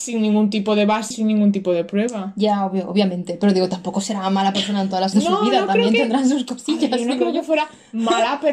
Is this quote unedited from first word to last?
no; 2 cuts; at 1.1 s, 5.1 s

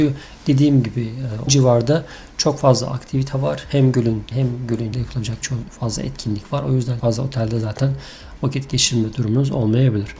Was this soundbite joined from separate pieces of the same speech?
yes; 5 cuts; at 1.5 s, 4.3 s, 4.9 s, 5.4 s, 7.0 s

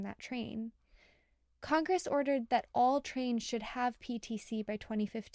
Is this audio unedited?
yes; 0 cuts

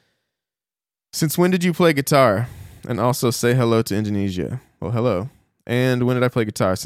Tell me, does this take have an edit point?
no; 0 cuts

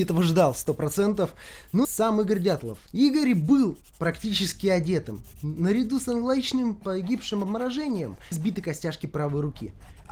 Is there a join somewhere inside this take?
yes; 4 cuts; at 1.8 s, 2.9 s, 6.8 s, 8.3 s

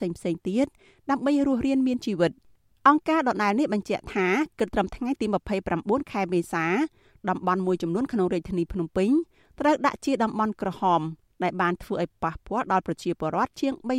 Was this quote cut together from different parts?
no; 0 cuts

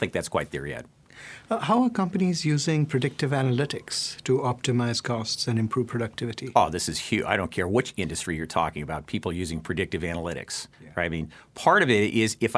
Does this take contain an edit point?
yes; 1 cut; at 10.7 s

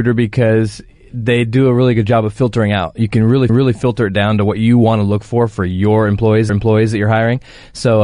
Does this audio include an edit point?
yes; 2 cuts; at 3.5 s, 6.5 s

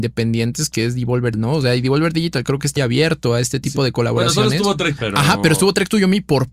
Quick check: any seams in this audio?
yes; 3 cuts; at 1.3 s, 2.8 s, 5.0 s

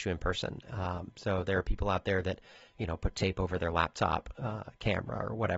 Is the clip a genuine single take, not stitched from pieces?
yes; 0 cuts

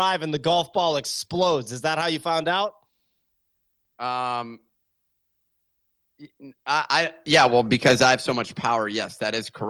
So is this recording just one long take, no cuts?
yes; 0 cuts

